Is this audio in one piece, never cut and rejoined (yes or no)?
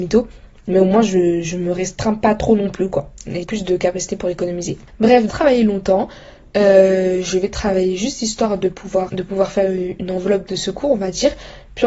no